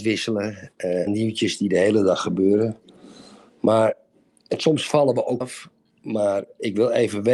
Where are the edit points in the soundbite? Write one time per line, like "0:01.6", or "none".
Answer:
0:01.1
0:05.4

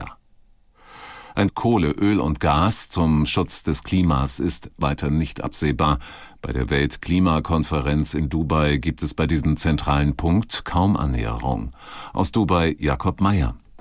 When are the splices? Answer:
0:01.5

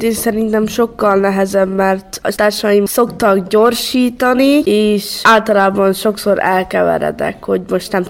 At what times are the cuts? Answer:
none

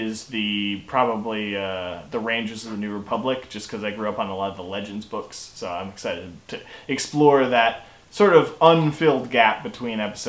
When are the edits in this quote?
none

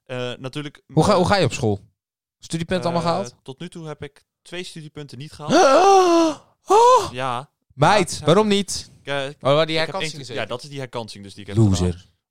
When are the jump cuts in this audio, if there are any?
none

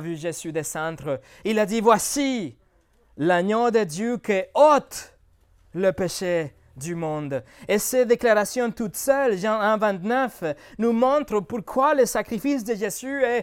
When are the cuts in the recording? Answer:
none

